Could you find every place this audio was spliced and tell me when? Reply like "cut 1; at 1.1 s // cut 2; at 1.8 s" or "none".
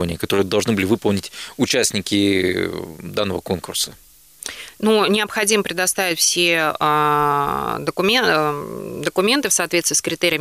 none